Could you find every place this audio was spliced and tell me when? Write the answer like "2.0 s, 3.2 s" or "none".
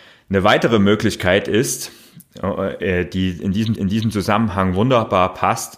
3.8 s

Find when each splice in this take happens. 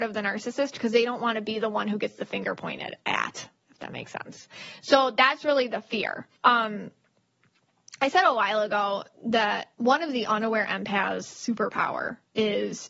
3.0 s, 6.4 s, 9.7 s

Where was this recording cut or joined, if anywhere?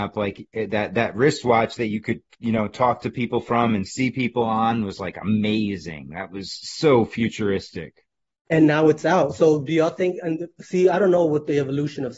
8.2 s

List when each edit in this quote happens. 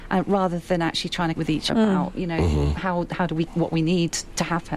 1.4 s, 1.7 s, 3.5 s

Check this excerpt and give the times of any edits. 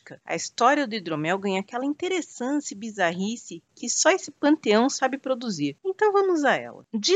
none

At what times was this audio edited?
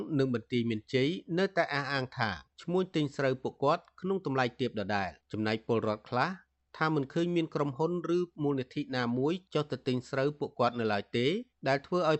5.2 s

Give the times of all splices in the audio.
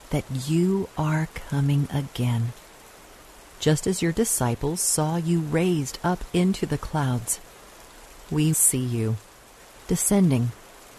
8.5 s

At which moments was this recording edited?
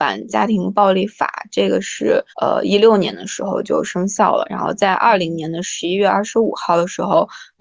2.3 s

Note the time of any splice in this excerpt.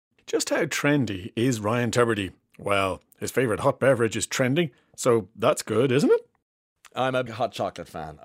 7.3 s

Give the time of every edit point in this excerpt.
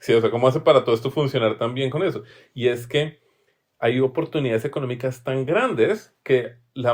none

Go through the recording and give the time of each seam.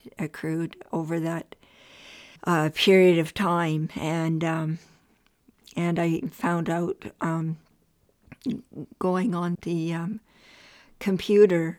0.9 s, 2.4 s, 9.5 s

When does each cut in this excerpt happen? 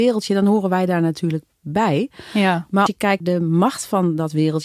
2.9 s, 3.2 s

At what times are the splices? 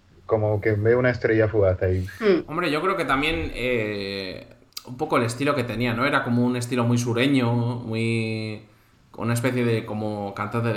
none

